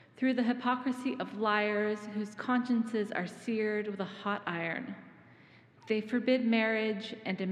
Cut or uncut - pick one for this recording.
uncut